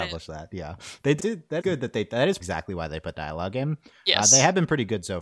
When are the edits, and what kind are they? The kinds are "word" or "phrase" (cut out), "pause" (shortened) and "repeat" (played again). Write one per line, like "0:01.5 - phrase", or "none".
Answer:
0:01.2 - word
0:01.6 - word
0:02.4 - word
0:03.1 - word